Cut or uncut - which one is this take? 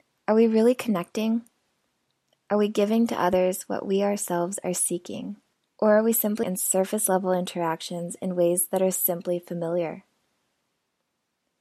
cut